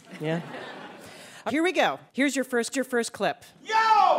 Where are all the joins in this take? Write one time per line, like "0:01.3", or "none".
0:01.5
0:02.1
0:02.7

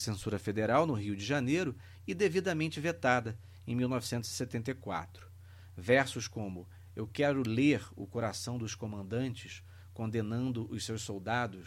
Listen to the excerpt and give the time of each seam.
none

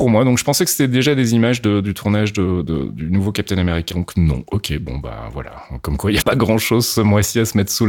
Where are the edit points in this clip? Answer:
0:03.9
0:06.2

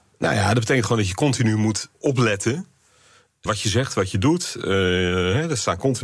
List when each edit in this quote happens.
0:01.9
0:03.5

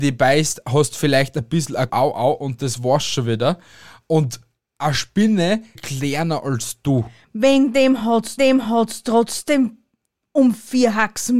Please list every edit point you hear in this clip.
0:01.9
0:05.8
0:08.4

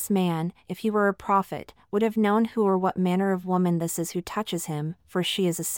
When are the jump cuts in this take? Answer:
none

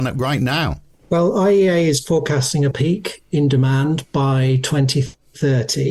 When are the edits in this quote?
0:02.7

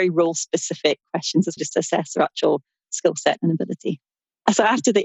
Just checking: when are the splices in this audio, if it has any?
0:01.6

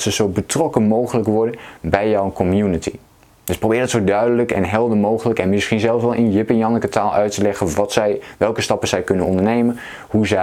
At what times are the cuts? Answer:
none

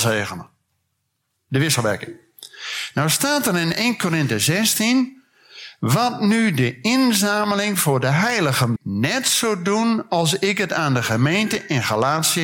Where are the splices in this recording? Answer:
0:08.8

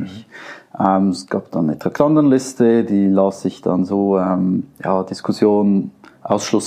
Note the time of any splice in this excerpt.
none

